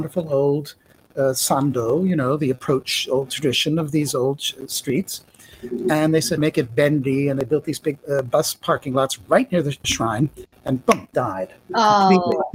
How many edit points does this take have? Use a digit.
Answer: 5